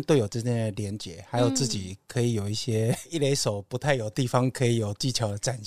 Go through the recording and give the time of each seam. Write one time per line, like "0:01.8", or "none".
0:03.1